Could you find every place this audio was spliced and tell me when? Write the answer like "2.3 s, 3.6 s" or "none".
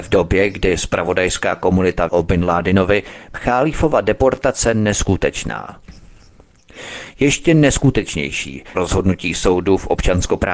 2.1 s, 3.3 s, 8.7 s